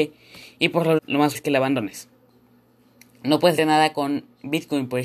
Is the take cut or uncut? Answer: cut